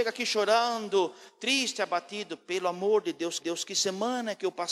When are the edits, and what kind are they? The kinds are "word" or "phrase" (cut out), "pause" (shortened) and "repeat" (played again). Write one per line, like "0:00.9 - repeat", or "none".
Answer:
0:03.4 - repeat